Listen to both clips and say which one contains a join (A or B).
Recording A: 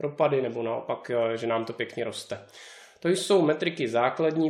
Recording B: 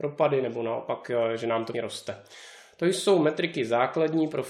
B